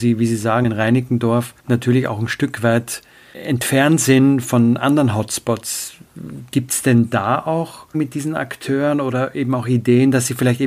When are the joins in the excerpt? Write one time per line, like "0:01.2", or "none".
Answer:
0:01.6
0:07.9